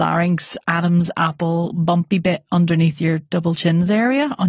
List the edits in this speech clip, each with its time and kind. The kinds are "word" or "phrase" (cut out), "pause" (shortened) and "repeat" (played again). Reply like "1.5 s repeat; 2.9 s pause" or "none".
none